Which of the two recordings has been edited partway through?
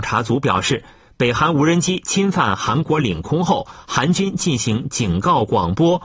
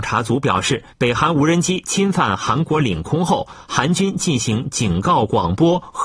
second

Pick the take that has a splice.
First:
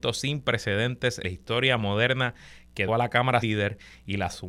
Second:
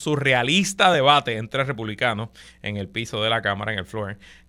first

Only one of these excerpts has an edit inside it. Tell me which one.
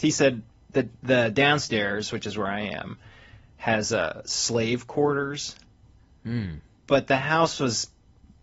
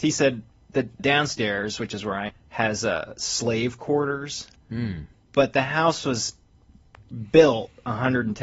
second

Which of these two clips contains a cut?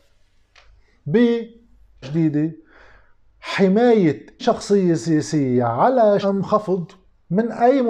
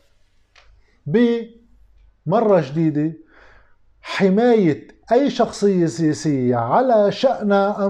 first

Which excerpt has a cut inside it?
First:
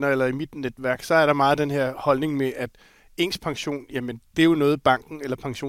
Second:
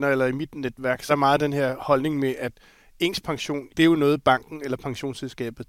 second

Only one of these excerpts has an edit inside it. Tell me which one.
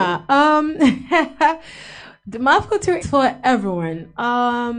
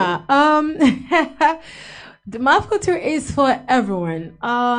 first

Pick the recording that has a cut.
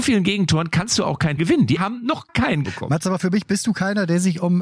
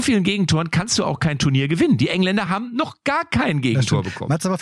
first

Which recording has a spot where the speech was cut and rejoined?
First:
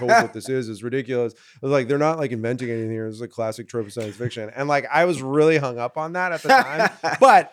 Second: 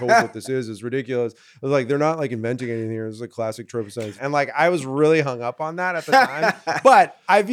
second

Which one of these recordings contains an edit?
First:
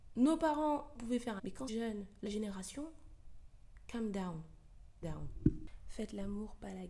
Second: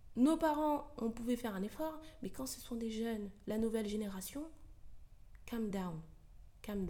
first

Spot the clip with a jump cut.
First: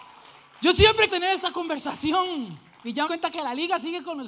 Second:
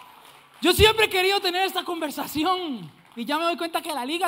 first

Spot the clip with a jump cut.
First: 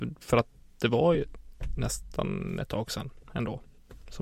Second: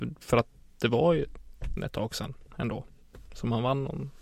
second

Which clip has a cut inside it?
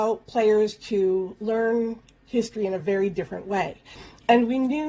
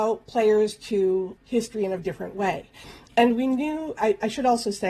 second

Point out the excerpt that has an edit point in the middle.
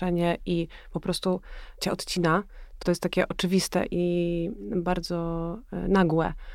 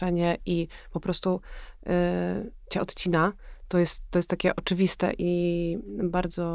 first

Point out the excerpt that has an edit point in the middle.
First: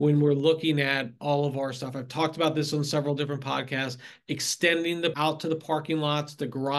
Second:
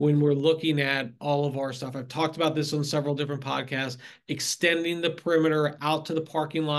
first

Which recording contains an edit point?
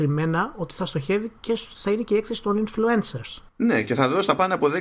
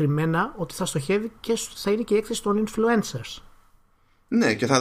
first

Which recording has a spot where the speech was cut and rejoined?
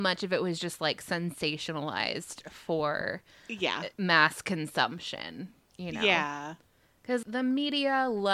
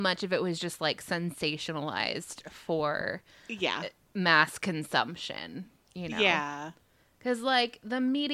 first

